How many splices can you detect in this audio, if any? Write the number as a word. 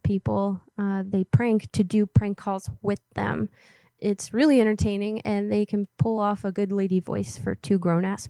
zero